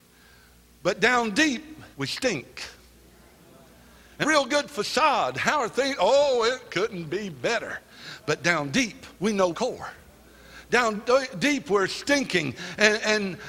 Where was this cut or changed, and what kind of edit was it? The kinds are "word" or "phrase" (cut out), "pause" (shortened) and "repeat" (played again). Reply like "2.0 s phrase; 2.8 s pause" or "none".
1.9 s pause; 4.2 s phrase; 9.1 s pause; 9.5 s phrase